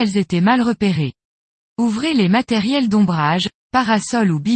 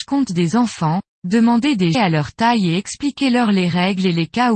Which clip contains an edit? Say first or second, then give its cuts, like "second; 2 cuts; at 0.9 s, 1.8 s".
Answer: second; 1 cut; at 1.9 s